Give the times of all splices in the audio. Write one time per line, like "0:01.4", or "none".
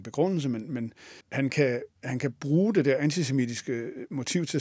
0:01.2